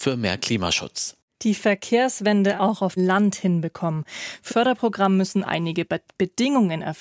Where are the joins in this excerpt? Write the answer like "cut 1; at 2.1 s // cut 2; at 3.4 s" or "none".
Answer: cut 1; at 2.6 s // cut 2; at 3.0 s // cut 3; at 4.5 s // cut 4; at 5.4 s